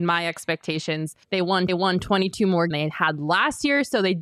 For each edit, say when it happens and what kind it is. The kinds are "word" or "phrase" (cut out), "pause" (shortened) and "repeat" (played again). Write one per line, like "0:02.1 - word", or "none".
0:01.2 - pause
0:01.7 - repeat
0:02.7 - phrase